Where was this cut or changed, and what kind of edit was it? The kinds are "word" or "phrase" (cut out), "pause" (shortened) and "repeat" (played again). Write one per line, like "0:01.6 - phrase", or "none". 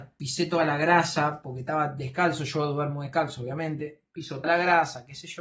0:04.4 - word